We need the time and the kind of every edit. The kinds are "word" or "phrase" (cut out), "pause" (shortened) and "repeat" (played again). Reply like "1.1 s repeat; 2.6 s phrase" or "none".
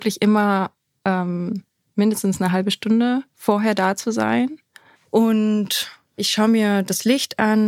3.3 s pause; 6.2 s word